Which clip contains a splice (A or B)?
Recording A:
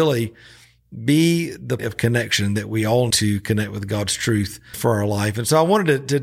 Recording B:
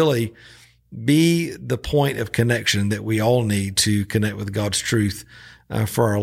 A